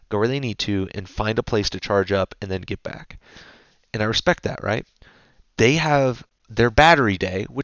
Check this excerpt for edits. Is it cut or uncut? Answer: uncut